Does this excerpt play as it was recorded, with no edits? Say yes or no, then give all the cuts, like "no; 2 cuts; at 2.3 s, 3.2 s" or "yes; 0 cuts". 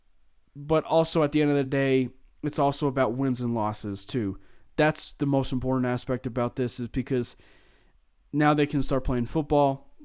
yes; 0 cuts